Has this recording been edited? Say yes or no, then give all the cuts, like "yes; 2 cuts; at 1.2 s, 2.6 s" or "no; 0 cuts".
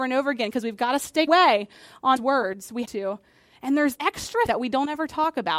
yes; 5 cuts; at 1.3 s, 2.2 s, 2.8 s, 3.9 s, 4.5 s